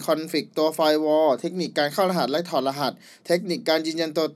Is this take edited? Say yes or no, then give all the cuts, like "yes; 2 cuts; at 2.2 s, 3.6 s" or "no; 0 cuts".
no; 0 cuts